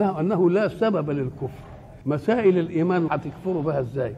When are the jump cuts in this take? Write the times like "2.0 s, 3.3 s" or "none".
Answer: 2.0 s, 3.1 s